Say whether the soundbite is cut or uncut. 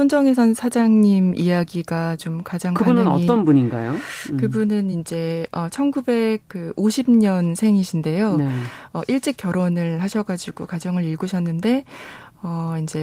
uncut